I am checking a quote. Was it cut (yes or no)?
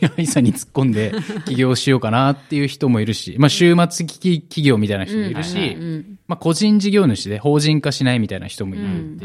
no